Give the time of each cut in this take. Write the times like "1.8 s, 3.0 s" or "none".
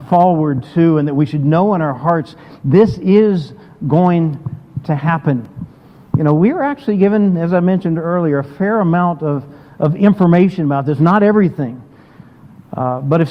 none